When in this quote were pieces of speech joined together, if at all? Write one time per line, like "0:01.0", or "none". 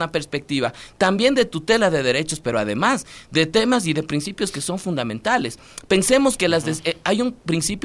none